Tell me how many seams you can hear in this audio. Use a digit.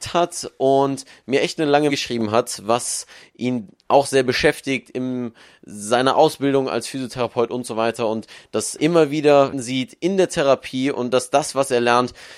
3